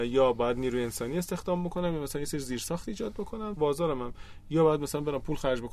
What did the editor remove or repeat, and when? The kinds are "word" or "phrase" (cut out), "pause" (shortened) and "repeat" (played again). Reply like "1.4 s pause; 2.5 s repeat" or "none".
3.6 s word